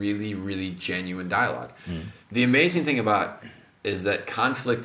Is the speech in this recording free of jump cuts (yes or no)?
no